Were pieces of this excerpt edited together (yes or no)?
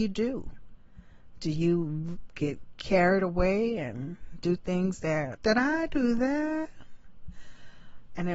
yes